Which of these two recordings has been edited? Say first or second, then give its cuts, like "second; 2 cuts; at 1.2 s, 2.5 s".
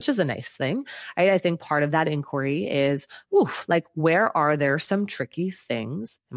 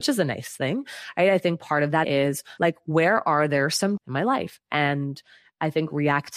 second; 3 cuts; at 2.0 s, 2.6 s, 4.0 s